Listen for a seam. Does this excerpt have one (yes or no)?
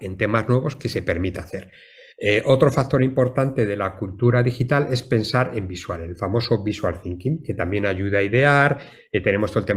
no